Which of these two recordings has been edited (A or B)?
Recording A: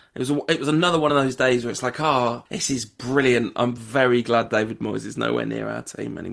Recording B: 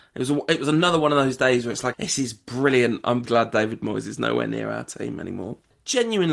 B